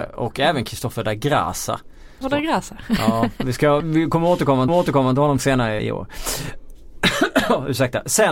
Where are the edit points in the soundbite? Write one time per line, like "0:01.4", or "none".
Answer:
0:02.2
0:03.8
0:04.7
0:05.8